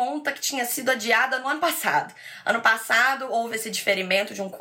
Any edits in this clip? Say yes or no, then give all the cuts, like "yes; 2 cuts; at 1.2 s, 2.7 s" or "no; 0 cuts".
no; 0 cuts